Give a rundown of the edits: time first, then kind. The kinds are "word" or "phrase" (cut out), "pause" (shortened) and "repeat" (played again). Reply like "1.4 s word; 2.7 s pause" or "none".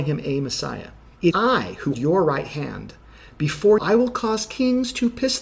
1.3 s word; 1.9 s word; 3.8 s word